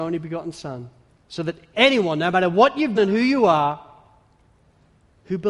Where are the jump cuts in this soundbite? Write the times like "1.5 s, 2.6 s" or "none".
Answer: 1.1 s, 1.7 s, 3.0 s